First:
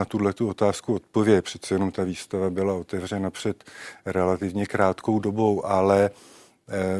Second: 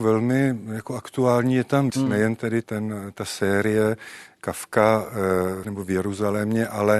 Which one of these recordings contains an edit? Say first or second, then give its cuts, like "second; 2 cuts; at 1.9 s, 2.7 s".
second; 3 cuts; at 1.9 s, 2.6 s, 5.6 s